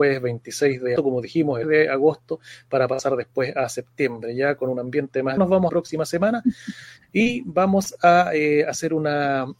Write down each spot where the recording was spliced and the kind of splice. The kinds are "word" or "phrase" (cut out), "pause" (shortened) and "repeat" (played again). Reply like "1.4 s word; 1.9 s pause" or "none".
1.0 s word; 1.6 s phrase; 5.4 s word; 5.7 s phrase